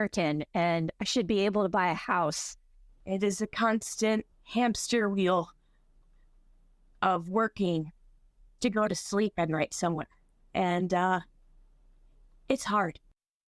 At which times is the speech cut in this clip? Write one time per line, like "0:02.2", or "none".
0:04.3
0:08.6